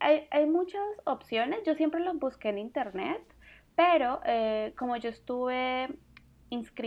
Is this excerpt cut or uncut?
uncut